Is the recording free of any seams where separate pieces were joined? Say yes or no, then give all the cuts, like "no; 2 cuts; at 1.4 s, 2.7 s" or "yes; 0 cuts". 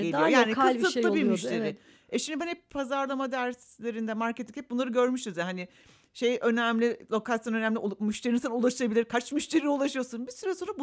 yes; 0 cuts